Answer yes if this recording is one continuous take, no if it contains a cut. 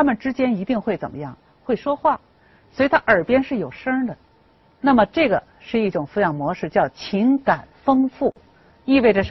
yes